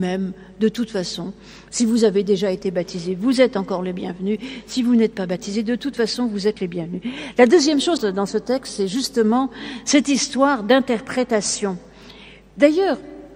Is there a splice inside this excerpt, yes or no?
yes